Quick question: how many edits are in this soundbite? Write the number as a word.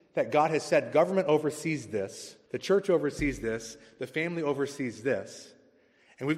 one